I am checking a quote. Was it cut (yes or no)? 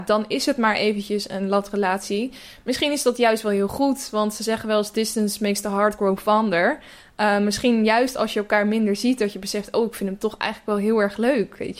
no